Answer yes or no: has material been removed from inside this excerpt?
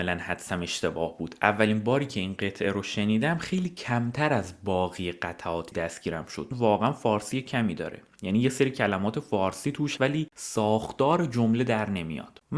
yes